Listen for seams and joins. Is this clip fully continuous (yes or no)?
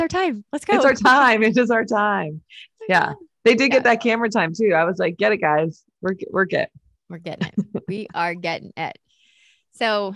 yes